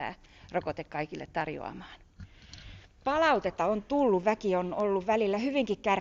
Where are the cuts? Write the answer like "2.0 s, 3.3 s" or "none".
3.6 s